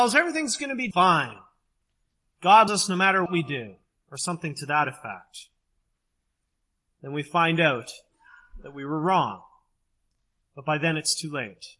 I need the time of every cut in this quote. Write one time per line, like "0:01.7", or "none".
0:00.9
0:02.7
0:03.3